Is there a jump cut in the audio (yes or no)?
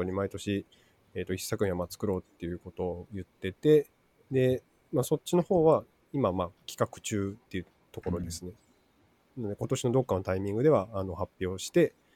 no